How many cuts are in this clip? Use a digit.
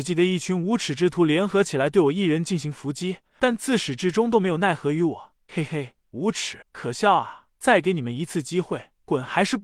1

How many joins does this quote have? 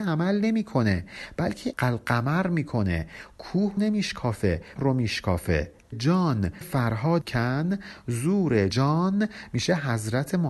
7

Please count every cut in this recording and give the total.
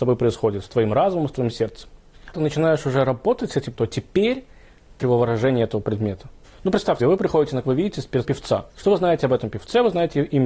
8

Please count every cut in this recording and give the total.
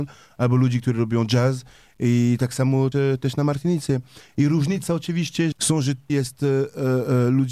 3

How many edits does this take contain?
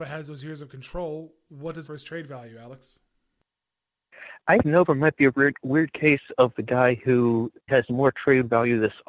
3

